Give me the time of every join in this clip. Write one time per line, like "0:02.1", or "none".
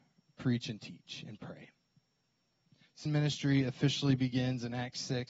0:03.1